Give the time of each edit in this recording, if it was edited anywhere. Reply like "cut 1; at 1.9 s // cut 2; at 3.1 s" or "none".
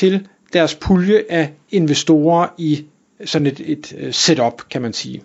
none